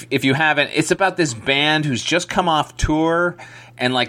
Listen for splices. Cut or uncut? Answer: uncut